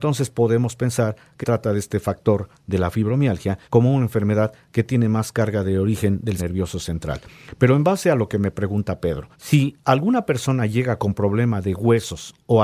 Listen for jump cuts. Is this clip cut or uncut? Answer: cut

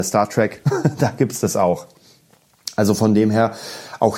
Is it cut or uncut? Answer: uncut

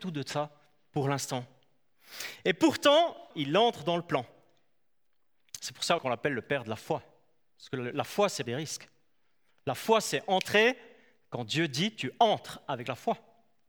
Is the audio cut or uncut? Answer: cut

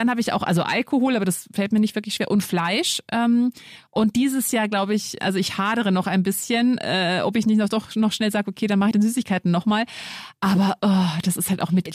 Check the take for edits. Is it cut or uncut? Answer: cut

